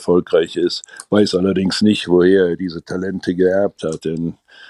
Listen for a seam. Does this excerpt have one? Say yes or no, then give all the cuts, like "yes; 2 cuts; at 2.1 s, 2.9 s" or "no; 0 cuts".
no; 0 cuts